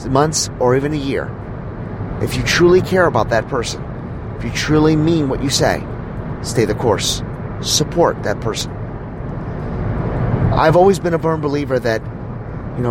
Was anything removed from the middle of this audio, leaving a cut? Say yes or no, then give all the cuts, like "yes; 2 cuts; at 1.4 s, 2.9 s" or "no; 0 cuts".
no; 0 cuts